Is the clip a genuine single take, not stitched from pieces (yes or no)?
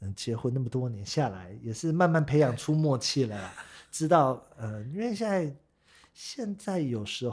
yes